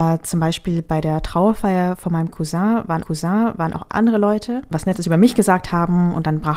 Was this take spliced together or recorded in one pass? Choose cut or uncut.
cut